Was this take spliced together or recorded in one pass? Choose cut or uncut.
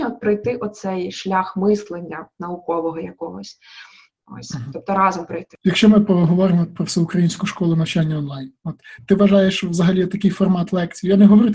uncut